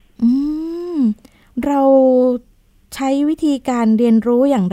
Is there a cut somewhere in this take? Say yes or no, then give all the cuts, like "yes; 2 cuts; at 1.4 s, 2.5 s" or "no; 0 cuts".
no; 0 cuts